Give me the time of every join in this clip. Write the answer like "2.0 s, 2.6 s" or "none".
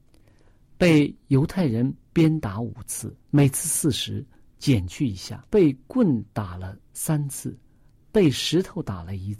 2.0 s, 3.2 s, 5.5 s